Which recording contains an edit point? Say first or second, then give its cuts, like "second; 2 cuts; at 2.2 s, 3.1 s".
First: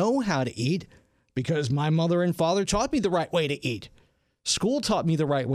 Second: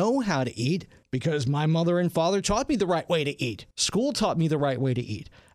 second; 2 cuts; at 1.0 s, 3.7 s